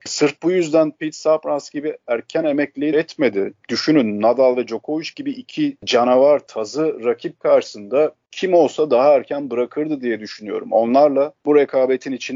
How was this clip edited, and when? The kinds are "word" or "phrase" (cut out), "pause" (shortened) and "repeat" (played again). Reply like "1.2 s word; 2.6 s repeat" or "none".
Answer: 2.9 s phrase